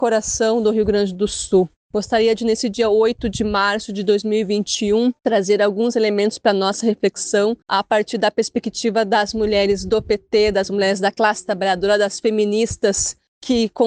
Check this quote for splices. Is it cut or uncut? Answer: cut